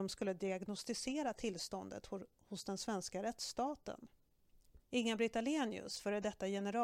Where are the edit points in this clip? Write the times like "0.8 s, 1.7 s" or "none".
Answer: 4.8 s